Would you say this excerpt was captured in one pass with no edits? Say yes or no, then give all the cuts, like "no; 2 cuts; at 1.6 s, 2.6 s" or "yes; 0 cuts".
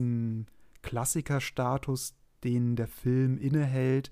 yes; 0 cuts